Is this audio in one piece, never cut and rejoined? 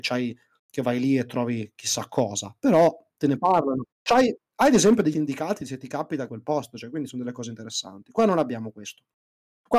no; 3 cuts; at 3.9 s, 5.1 s, 6.3 s

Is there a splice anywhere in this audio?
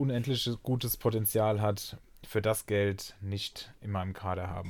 no; 0 cuts

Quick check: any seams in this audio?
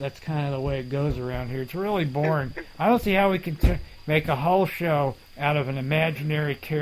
yes; 1 cut; at 5.3 s

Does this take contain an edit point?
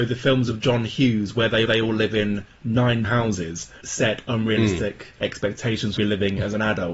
yes; 4 cuts; at 1.7 s, 3.0 s, 3.8 s, 6.0 s

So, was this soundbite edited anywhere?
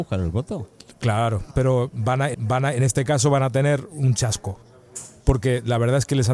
yes; 1 cut; at 2.3 s

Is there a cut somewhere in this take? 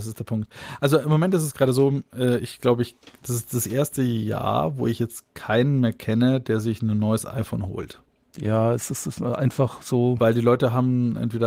no; 0 cuts

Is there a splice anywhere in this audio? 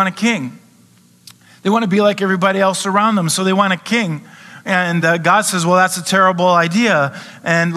no; 0 cuts

